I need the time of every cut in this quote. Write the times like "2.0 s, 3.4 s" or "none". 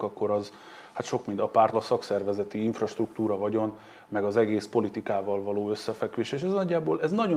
1.7 s